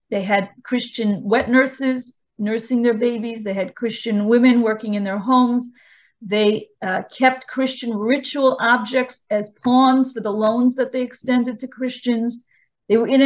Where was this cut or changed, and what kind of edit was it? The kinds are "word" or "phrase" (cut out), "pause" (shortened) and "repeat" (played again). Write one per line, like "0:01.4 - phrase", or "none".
none